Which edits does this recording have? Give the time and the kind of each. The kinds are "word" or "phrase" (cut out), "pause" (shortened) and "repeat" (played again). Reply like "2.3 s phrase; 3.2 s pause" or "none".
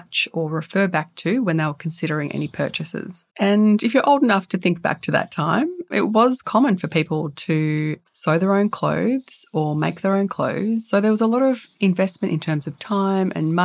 3.3 s pause; 6.4 s word; 8.1 s pause